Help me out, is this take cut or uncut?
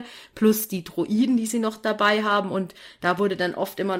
uncut